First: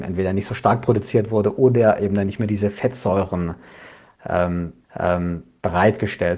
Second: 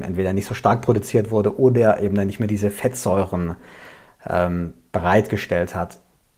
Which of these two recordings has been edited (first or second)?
first